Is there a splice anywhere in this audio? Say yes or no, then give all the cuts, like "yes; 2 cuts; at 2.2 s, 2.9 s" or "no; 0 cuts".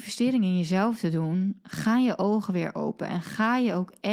no; 0 cuts